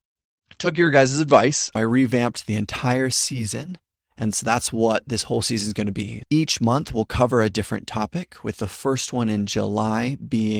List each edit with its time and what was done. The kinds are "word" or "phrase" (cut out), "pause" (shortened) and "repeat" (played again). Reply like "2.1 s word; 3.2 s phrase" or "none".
none